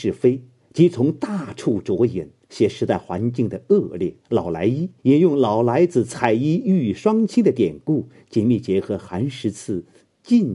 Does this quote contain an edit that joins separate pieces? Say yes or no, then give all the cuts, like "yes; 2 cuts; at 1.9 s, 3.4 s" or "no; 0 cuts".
yes; 2 cuts; at 4.2 s, 5.0 s